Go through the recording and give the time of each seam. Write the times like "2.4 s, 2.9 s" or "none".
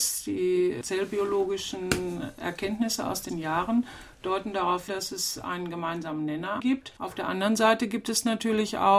3.3 s, 4.9 s, 6.6 s